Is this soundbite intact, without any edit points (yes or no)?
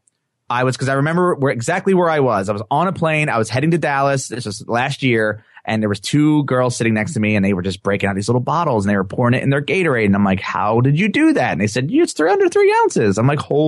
yes